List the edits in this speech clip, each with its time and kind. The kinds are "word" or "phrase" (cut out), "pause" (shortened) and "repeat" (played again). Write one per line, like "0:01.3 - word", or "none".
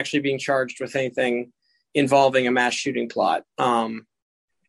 none